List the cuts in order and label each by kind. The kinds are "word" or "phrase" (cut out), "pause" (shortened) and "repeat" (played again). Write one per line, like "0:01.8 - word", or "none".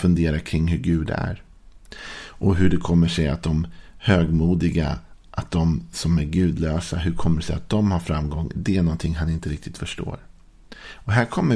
none